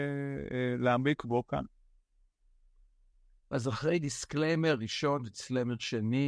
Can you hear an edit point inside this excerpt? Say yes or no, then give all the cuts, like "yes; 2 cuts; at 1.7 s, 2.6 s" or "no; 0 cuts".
no; 0 cuts